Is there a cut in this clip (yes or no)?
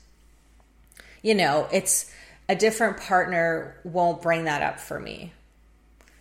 no